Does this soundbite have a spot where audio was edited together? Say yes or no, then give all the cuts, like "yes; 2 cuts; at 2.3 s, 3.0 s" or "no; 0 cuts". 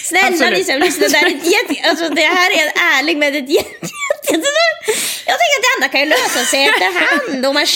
no; 0 cuts